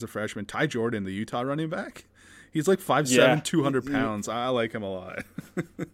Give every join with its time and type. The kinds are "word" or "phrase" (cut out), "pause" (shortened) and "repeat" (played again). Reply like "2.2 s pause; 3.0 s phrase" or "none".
none